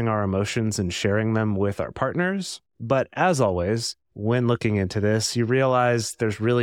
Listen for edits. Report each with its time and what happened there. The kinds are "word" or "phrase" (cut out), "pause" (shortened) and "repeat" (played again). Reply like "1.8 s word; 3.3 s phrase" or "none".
4.0 s pause